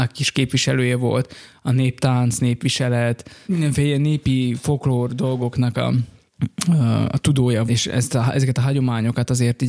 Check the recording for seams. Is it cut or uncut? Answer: cut